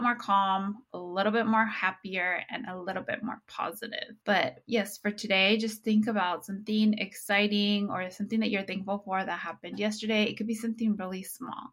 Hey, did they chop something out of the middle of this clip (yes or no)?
yes